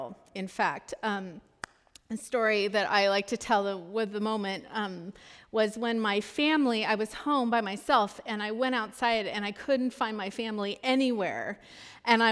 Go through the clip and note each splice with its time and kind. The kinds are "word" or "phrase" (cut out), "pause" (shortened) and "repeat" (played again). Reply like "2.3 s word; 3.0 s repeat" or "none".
none